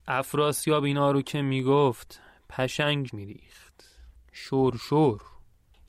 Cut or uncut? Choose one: cut